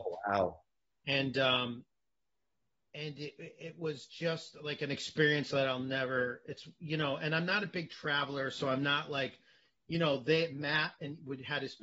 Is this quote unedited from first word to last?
yes; 0 cuts

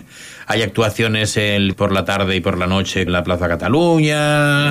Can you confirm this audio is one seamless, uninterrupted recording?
no; 2 cuts; at 1.7 s, 3.1 s

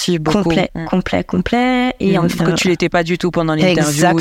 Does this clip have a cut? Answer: yes; 1 cut; at 2.4 s

